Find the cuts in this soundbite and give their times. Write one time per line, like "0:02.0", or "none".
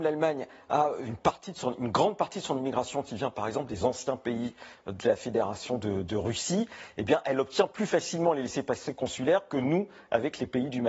none